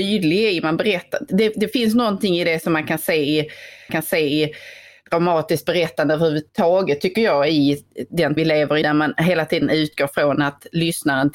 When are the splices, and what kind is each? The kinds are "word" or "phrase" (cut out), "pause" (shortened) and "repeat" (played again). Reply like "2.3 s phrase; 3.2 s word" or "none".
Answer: 3.9 s repeat; 6.5 s pause; 8.4 s word; 8.8 s word